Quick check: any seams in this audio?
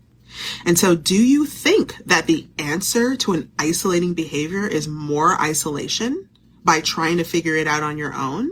no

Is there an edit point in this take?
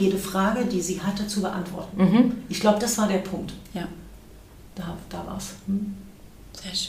no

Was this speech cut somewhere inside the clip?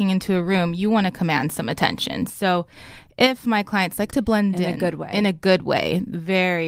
yes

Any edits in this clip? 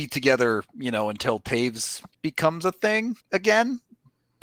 yes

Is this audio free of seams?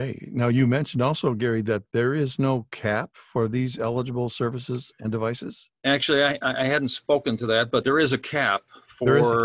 yes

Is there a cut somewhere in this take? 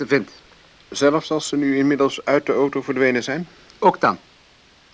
no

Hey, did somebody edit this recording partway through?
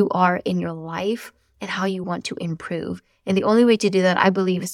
no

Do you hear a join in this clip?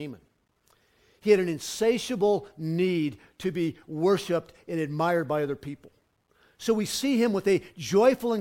no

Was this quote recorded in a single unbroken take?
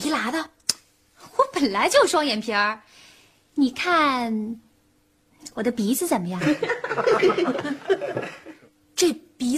yes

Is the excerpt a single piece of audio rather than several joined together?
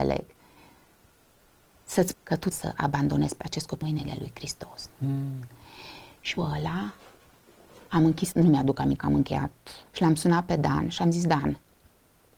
no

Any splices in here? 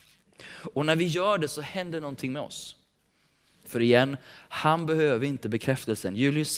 no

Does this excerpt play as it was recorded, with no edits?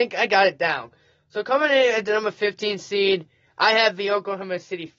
yes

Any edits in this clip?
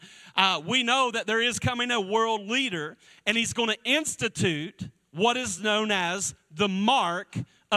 no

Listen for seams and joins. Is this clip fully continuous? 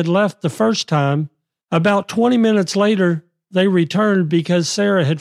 yes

